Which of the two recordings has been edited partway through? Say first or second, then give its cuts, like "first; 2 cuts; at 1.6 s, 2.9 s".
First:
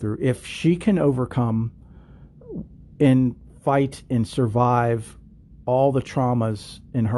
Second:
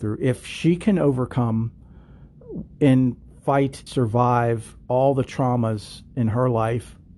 second; 3 cuts; at 2.7 s, 3.9 s, 4.8 s